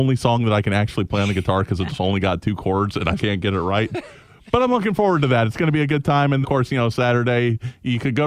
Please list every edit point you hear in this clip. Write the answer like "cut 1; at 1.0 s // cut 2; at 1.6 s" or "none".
cut 1; at 3.2 s // cut 2; at 6.4 s